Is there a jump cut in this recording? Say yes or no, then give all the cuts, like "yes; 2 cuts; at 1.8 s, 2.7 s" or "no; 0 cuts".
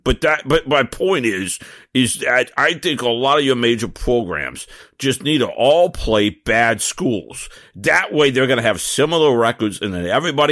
no; 0 cuts